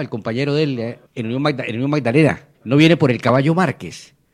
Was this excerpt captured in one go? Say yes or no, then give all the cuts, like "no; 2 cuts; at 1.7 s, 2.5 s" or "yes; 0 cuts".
no; 2 cuts; at 1.1 s, 2.5 s